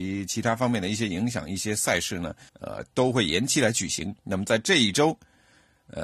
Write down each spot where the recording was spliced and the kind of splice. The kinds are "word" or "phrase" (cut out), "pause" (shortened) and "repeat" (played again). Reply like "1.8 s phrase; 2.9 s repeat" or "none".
2.5 s pause; 4.2 s pause

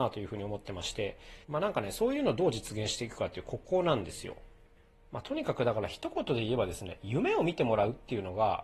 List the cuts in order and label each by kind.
1.4 s pause; 4.7 s pause

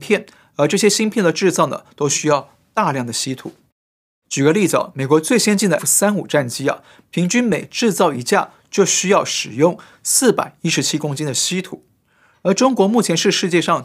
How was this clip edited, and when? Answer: 5.8 s word

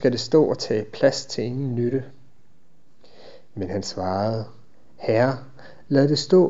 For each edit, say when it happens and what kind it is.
none

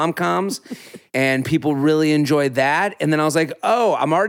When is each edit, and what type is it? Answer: 1.1 s pause

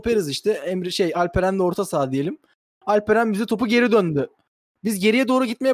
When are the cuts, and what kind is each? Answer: none

